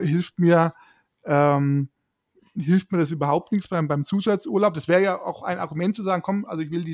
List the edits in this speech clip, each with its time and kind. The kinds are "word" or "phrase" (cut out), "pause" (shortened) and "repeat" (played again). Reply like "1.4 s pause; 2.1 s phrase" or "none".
none